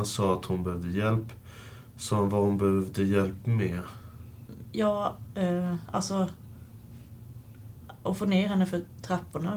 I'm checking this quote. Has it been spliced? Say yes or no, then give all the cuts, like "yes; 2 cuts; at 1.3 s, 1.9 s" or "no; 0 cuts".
no; 0 cuts